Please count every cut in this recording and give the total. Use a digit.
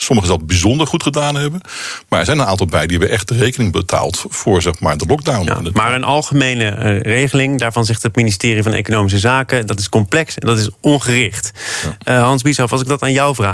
0